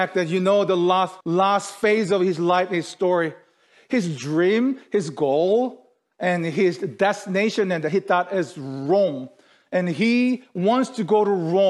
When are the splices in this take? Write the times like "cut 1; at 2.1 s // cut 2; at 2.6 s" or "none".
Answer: cut 1; at 1.2 s